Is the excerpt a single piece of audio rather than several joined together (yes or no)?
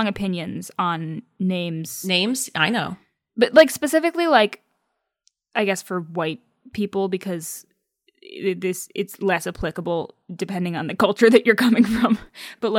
yes